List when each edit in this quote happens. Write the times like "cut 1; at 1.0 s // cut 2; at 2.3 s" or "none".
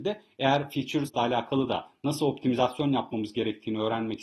cut 1; at 1.1 s

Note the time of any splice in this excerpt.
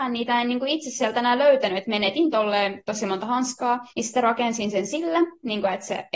cut 1; at 3.9 s

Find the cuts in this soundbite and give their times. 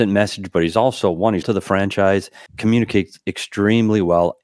cut 1; at 1.4 s // cut 2; at 2.5 s

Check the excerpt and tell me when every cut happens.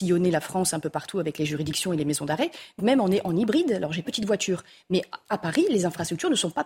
cut 1; at 2.8 s // cut 2; at 4.0 s

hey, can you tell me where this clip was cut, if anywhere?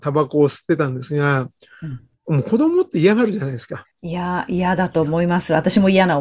cut 1; at 3.9 s

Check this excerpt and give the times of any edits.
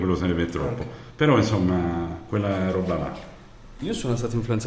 none

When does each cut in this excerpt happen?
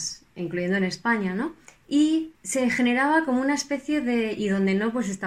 cut 1; at 2.3 s

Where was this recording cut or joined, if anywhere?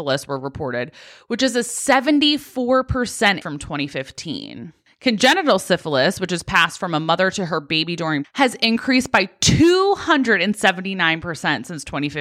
cut 1; at 3.4 s // cut 2; at 8.2 s

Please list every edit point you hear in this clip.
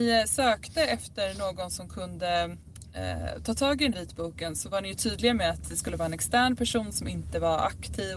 cut 1; at 3.9 s

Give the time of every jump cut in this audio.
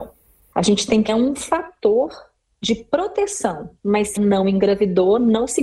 cut 1; at 1.1 s // cut 2; at 3.8 s // cut 3; at 4.2 s

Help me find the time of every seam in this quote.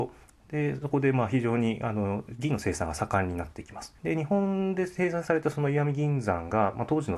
cut 1; at 4.0 s

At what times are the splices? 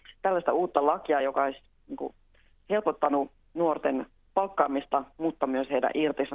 none

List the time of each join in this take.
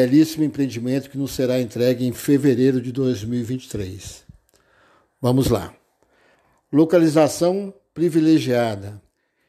none

